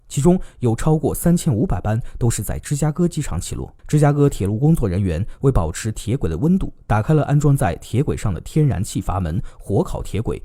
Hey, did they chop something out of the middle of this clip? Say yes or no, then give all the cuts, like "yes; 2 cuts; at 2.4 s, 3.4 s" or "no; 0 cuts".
yes; 1 cut; at 3.8 s